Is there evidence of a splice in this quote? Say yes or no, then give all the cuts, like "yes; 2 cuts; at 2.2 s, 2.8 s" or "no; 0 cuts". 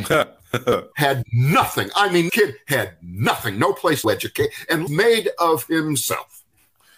yes; 4 cuts; at 0.9 s, 2.3 s, 4.0 s, 4.9 s